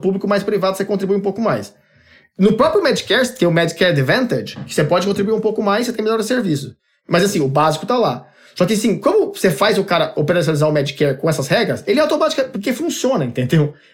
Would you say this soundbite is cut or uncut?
uncut